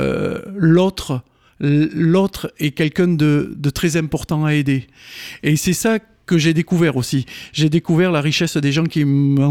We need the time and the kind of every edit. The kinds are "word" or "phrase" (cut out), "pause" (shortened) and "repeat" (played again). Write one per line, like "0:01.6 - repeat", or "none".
none